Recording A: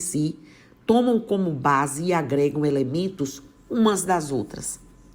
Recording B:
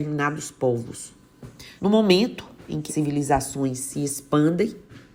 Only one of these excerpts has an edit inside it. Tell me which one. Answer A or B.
B